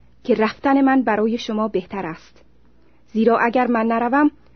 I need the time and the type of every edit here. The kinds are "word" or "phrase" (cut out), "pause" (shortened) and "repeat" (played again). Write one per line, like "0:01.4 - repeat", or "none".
none